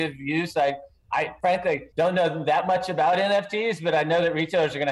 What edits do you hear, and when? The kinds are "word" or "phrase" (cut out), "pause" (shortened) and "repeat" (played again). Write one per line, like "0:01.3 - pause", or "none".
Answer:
0:01.9 - pause